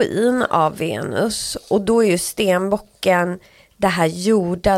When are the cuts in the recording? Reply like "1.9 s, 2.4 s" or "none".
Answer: none